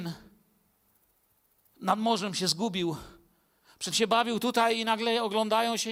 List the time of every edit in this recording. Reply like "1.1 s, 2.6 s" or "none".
3.9 s